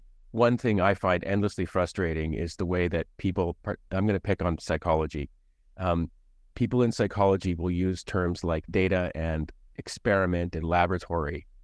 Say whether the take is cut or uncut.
uncut